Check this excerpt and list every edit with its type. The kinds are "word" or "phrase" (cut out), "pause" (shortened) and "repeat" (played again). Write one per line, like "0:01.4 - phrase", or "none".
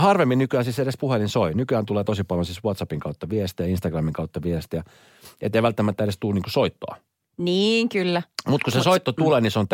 none